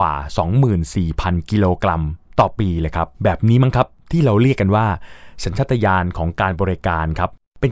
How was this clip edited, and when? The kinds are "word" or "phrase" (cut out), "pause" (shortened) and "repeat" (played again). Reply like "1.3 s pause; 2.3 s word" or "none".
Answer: 3.1 s pause